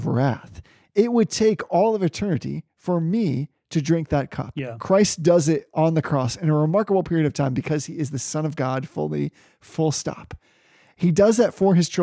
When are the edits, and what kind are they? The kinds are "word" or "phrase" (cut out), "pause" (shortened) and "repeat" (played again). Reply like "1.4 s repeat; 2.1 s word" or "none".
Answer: none